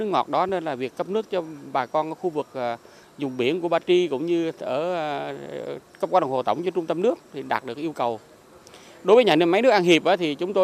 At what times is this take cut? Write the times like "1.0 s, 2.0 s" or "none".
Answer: none